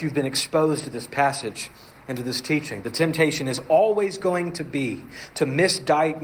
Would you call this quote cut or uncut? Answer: uncut